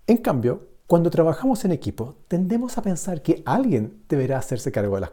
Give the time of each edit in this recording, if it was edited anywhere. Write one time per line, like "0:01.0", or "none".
none